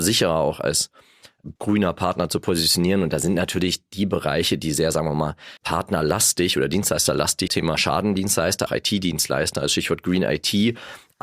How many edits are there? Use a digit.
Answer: 4